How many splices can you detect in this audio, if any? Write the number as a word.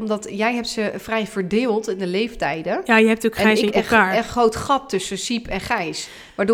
one